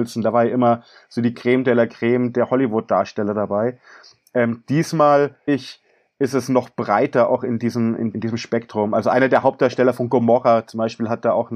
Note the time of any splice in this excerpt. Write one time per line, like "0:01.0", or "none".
0:05.5
0:08.1